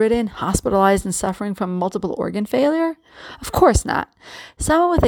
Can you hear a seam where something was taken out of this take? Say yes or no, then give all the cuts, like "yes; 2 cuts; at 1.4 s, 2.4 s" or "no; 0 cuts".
no; 0 cuts